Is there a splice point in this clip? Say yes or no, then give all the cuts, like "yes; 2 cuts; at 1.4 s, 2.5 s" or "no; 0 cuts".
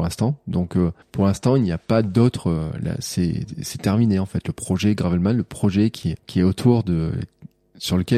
yes; 2 cuts; at 1.0 s, 6.2 s